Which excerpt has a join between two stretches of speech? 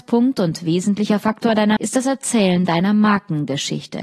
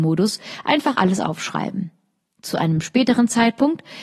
first; 1 cut; at 1.8 s

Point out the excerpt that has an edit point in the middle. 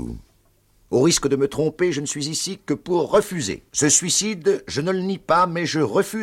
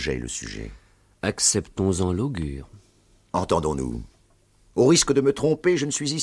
first; 1 cut; at 3.7 s

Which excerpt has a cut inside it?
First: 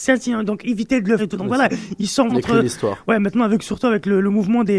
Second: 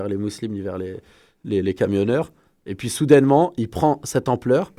first; 2 cuts; at 1.2 s, 2.3 s

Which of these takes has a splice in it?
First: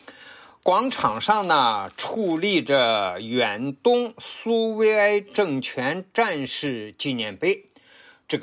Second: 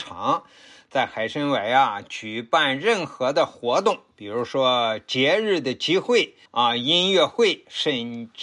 second; 1 cut; at 6.5 s

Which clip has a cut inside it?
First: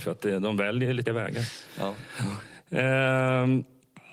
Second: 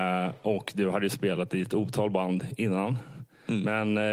first; 1 cut; at 1.1 s

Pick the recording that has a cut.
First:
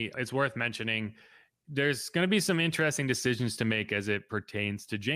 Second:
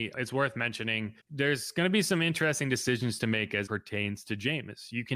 second; 2 cuts; at 1.2 s, 3.7 s

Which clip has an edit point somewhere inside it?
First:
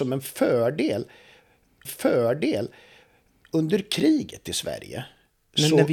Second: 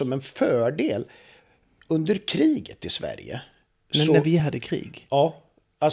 first; 1 cut; at 1.8 s

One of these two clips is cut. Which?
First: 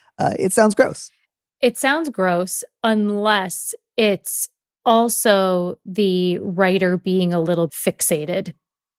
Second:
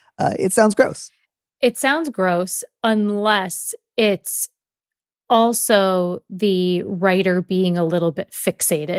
first; 2 cuts; at 4.7 s, 7.7 s

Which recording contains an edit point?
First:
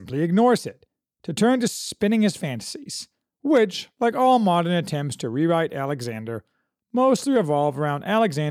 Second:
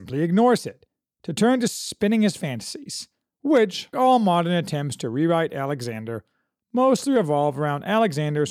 second; 1 cut; at 3.9 s

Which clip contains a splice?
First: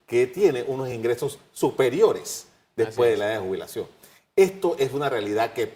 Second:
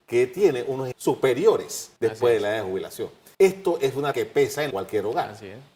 second; 5 cuts; at 0.9 s, 2.0 s, 3.3 s, 4.1 s, 4.7 s

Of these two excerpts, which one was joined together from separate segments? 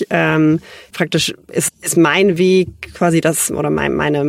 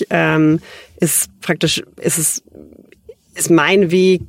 first; 2 cuts; at 0.9 s, 1.7 s

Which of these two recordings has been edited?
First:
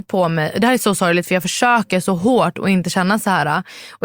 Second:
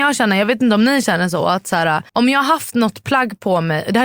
second; 1 cut; at 2.1 s

